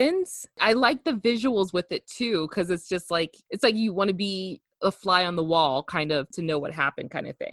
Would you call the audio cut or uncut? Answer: uncut